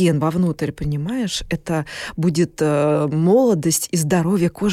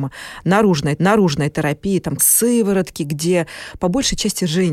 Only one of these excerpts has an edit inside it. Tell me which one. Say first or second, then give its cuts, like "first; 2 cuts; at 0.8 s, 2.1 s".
second; 2 cuts; at 1.0 s, 2.2 s